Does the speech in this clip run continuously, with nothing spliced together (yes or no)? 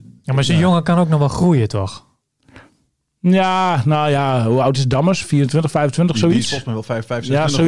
yes